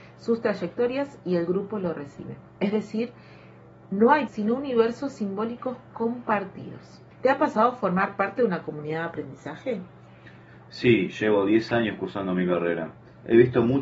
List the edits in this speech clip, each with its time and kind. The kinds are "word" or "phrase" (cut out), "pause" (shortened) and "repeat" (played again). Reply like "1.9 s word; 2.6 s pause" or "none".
4.3 s phrase; 7.1 s pause